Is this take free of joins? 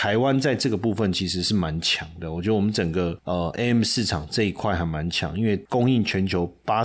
yes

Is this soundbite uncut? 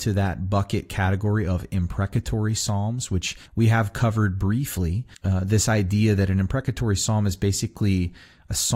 no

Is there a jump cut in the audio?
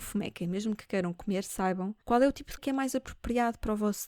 yes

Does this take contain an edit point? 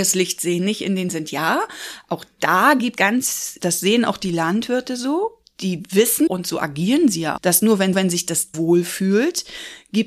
yes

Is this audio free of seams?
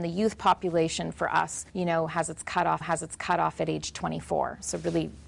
no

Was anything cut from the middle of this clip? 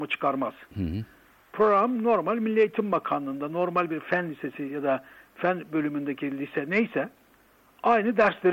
no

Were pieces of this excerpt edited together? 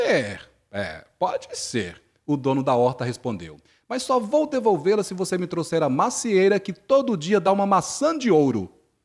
no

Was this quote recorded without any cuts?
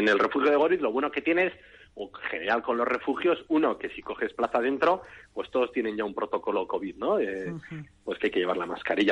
yes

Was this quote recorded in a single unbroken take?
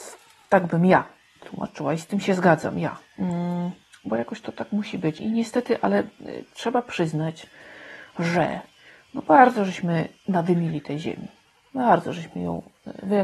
no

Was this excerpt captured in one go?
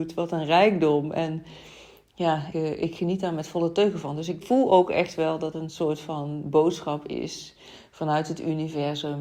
no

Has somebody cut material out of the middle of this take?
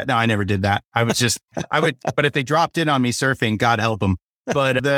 no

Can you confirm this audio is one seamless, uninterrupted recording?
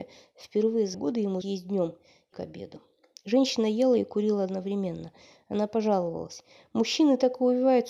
no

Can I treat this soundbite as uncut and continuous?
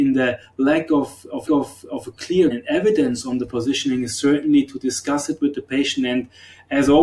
no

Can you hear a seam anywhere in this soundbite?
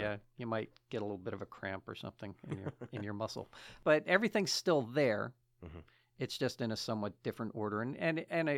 no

